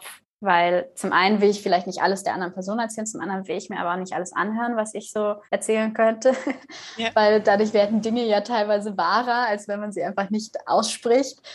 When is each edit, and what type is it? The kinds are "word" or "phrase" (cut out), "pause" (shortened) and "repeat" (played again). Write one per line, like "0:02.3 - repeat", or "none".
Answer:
0:05.4 - pause